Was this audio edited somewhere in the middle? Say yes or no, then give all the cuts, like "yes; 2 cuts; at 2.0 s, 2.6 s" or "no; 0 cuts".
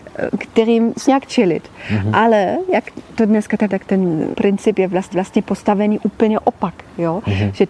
yes; 4 cuts; at 1.0 s, 3.7 s, 4.3 s, 5.1 s